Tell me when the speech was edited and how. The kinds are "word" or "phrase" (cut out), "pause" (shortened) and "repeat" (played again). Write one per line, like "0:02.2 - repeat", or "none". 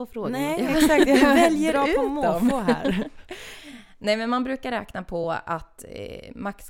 none

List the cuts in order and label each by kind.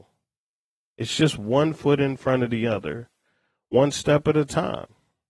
none

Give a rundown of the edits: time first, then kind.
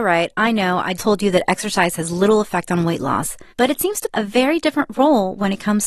0:01.0 - word
0:03.5 - pause
0:04.1 - word

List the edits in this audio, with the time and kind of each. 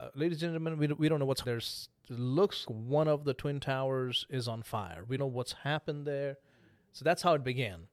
0:01.4 - phrase
0:02.6 - word
0:05.2 - word

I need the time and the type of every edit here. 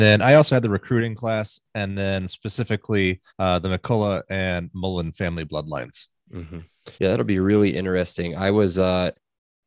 0:03.3 - pause
0:06.9 - pause

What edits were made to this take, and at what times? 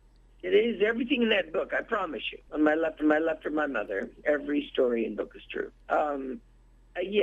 0:02.5 - pause
0:03.0 - repeat
0:05.2 - word
0:05.8 - pause

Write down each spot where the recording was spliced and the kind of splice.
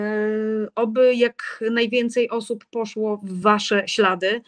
none

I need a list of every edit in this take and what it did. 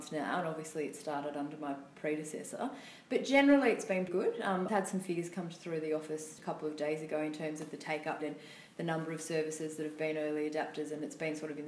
0:04.1 - word
0:04.7 - word
0:06.4 - word
0:08.2 - word

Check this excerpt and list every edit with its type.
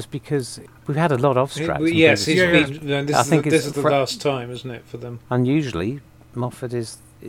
none

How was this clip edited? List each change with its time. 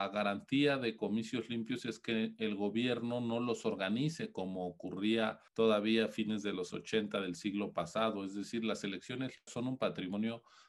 0:05.5 - pause
0:06.7 - word
0:09.5 - word

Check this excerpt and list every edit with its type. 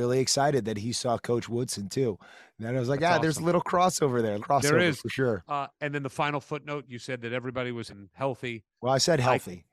0:04.4 - word
0:07.9 - word

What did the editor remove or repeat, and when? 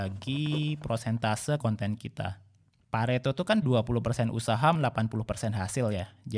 0:01.6 - word
0:03.6 - word
0:04.8 - word

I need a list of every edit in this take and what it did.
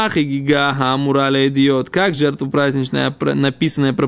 none

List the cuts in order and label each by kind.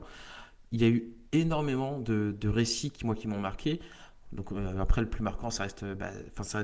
0:01.3 - pause

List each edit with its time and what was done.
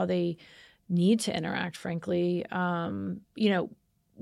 0:03.2 - pause

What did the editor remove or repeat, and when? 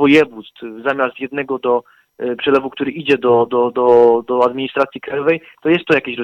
none

